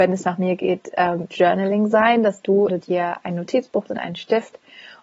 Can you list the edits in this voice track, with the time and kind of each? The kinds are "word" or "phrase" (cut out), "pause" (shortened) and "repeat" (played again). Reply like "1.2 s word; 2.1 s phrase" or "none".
1.3 s word; 2.7 s word; 3.9 s word